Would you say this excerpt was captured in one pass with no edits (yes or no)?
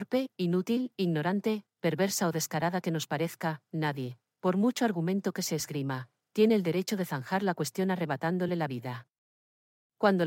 yes